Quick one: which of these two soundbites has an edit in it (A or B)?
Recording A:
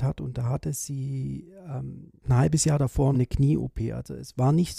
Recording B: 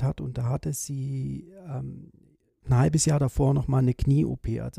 A